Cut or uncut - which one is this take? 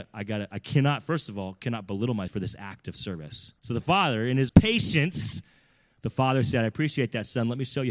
cut